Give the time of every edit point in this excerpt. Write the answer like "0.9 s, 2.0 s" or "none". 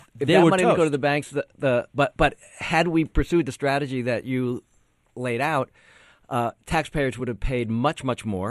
none